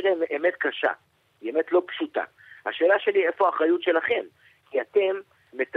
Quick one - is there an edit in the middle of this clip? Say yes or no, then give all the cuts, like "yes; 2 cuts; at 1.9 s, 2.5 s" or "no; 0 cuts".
no; 0 cuts